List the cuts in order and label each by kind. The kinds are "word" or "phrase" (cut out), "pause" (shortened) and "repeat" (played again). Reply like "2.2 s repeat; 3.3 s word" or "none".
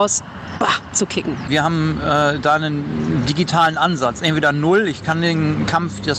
none